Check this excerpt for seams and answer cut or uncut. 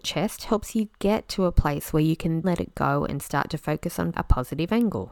cut